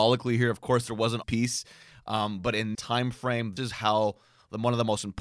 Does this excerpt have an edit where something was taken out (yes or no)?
yes